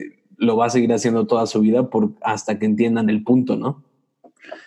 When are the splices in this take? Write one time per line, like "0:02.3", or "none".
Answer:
none